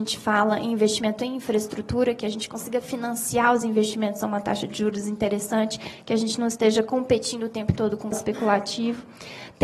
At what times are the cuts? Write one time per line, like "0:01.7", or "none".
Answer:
0:08.1